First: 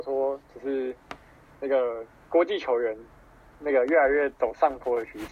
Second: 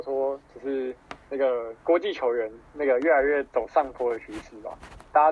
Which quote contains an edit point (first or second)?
second